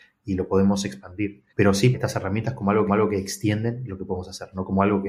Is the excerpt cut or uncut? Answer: cut